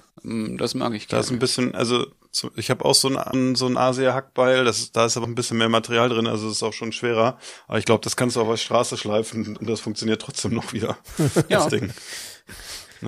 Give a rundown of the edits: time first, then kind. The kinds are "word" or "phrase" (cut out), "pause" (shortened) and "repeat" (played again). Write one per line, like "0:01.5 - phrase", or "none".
0:03.3 - word
0:05.2 - word

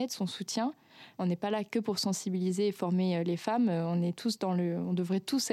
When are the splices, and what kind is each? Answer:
none

